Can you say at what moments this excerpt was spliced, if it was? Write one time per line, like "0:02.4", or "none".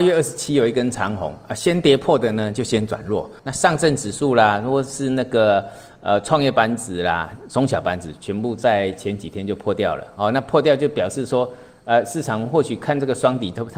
0:03.4